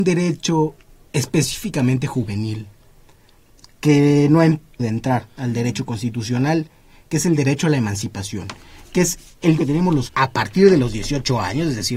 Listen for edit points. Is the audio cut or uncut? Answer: cut